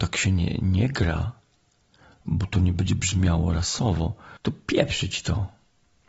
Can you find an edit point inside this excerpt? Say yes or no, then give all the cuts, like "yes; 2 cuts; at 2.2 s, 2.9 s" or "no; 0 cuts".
yes; 1 cut; at 4.4 s